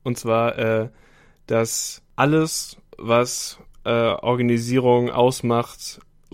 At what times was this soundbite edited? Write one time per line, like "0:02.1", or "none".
none